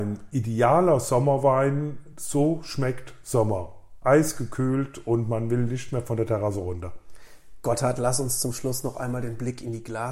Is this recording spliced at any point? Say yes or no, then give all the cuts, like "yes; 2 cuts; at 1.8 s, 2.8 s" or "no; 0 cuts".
no; 0 cuts